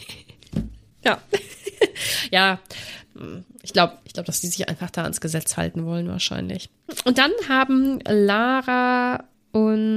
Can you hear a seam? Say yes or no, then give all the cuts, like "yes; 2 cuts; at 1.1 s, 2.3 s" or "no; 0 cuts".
yes; 1 cut; at 4.0 s